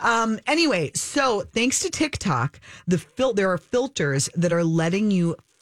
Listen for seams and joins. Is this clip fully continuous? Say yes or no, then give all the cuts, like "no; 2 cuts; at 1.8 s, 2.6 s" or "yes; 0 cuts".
yes; 0 cuts